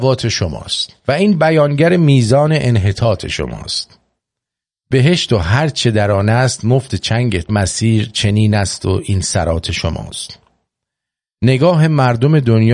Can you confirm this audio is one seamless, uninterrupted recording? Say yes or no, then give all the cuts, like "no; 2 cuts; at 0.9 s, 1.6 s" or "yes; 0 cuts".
no; 2 cuts; at 1.0 s, 7.5 s